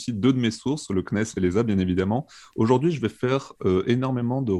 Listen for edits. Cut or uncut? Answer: uncut